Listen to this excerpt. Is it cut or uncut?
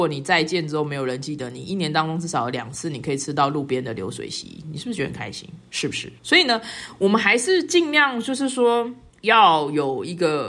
cut